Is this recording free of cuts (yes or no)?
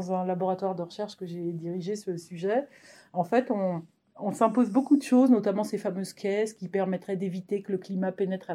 yes